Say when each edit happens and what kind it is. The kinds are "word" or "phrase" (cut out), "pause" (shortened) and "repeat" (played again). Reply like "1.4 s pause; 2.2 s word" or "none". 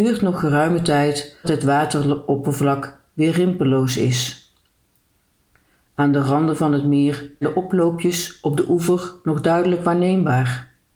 1.4 s word; 7.4 s word